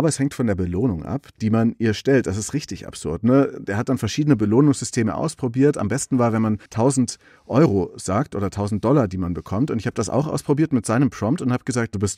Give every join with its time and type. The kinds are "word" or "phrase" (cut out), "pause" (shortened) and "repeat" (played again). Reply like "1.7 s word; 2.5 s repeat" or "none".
6.7 s pause